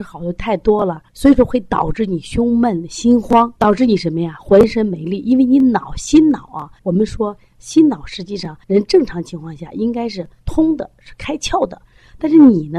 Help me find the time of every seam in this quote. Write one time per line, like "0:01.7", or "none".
0:01.1
0:03.6
0:06.8
0:08.6
0:10.4